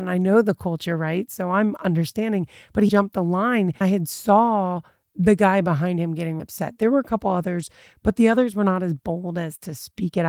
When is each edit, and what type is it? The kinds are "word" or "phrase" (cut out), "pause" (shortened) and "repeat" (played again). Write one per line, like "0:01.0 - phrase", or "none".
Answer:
0:02.9 - word
0:03.8 - word
0:06.4 - word